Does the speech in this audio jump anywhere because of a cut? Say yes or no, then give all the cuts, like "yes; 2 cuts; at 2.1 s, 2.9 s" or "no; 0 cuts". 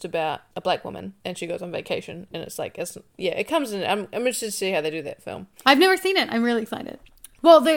no; 0 cuts